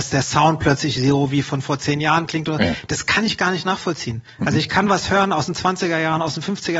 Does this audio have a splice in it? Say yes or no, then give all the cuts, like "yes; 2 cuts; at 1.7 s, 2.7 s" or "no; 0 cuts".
no; 0 cuts